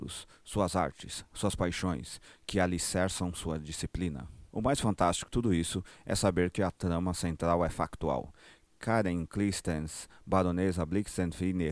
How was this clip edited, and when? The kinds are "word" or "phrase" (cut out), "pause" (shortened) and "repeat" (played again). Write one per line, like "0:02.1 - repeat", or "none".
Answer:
0:05.3 - word
0:06.6 - word